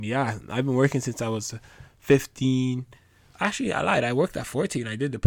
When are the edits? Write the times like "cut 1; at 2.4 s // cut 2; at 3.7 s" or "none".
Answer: none